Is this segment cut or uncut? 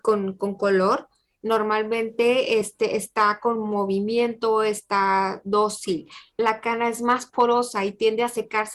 uncut